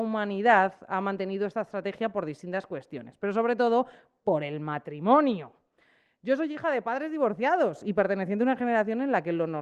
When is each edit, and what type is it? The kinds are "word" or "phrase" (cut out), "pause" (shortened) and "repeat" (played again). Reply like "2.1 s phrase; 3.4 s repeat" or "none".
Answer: none